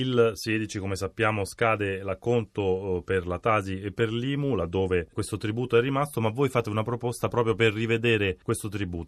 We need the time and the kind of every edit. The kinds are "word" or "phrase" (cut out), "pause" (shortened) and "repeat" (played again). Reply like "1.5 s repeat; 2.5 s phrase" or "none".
none